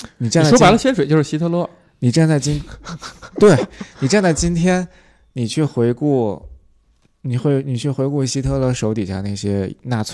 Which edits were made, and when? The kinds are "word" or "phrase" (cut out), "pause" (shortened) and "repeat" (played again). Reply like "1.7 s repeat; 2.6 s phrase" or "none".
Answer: none